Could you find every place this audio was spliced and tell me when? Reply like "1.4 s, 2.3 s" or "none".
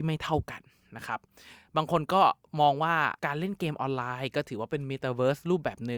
3.2 s